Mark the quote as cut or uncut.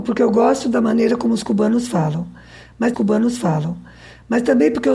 cut